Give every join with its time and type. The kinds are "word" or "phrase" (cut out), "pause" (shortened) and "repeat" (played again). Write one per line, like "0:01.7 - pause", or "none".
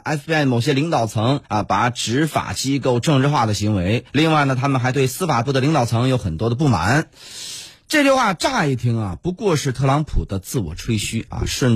0:01.4 - pause
0:04.1 - pause